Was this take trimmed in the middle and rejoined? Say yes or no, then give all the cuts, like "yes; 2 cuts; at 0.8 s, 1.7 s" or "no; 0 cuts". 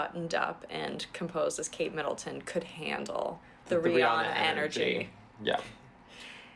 no; 0 cuts